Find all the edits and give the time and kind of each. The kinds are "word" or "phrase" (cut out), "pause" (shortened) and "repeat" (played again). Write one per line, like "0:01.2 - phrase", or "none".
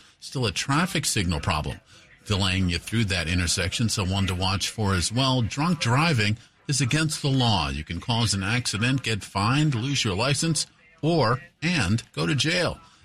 none